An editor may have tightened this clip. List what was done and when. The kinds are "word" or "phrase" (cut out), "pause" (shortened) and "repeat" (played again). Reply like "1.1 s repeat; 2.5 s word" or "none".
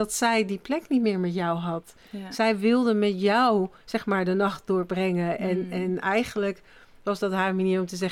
none